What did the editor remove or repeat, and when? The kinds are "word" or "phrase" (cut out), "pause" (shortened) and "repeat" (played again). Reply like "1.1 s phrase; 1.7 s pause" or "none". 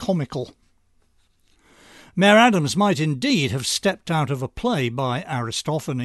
none